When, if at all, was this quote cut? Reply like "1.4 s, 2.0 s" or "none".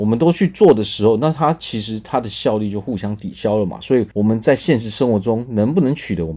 4.1 s